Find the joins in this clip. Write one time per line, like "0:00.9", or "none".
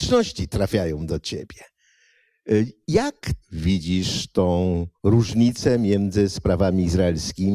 0:03.4
0:05.0